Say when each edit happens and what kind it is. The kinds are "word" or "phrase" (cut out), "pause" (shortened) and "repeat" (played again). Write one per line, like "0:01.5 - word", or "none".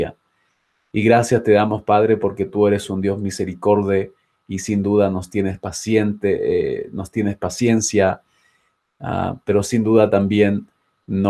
none